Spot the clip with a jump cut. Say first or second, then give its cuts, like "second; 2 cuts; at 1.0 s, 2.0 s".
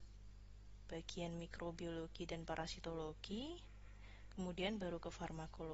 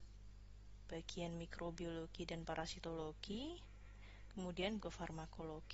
second; 1 cut; at 4.8 s